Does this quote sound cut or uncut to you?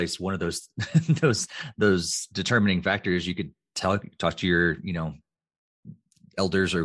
uncut